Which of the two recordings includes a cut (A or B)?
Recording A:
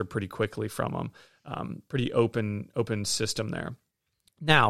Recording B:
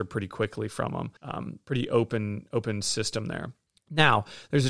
B